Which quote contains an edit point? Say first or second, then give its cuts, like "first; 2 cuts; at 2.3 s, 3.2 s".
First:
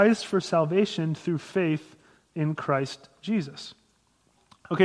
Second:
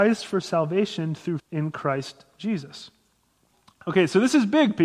second; 1 cut; at 1.4 s